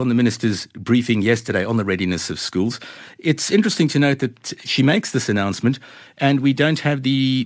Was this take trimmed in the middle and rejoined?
no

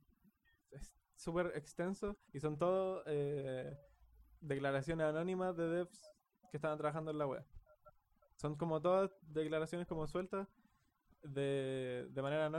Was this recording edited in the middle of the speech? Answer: yes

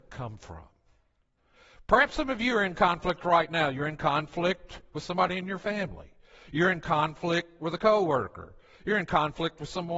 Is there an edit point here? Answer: no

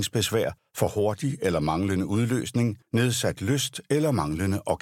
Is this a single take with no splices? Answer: yes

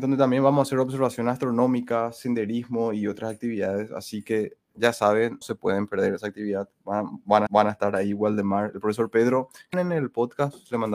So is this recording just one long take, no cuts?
no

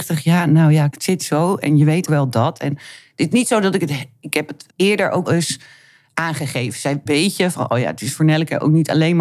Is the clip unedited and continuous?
no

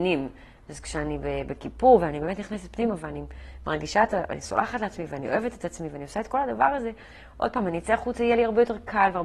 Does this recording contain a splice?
no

